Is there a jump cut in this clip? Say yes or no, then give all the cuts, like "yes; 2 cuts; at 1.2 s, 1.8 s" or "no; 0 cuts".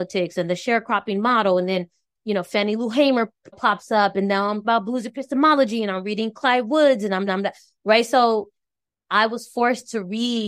yes; 2 cuts; at 4.6 s, 7.3 s